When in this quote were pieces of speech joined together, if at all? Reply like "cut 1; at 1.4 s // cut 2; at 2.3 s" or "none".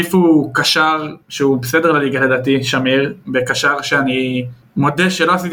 cut 1; at 1.2 s